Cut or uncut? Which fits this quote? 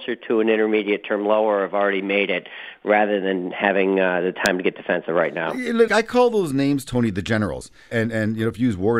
cut